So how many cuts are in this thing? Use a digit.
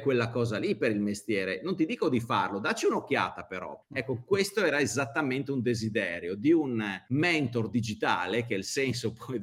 1